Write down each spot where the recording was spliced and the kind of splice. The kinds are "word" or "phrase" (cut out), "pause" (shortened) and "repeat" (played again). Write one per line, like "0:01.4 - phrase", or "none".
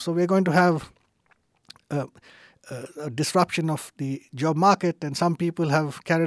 none